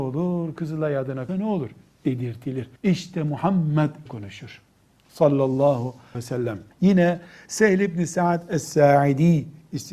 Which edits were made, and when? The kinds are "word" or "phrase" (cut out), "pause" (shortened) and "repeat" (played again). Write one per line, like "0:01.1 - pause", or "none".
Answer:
0:01.3 - word
0:02.8 - pause
0:04.1 - phrase
0:06.1 - word
0:06.7 - pause